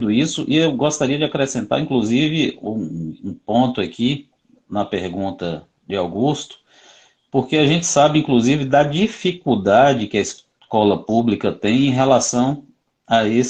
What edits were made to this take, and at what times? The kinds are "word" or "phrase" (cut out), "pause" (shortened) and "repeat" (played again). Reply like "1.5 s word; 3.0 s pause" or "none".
none